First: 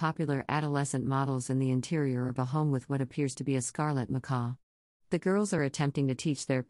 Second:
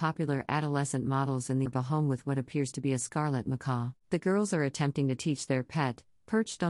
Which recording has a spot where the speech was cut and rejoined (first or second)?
second